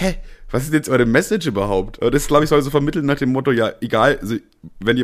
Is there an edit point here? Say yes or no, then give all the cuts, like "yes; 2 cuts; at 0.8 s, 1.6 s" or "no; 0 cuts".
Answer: no; 0 cuts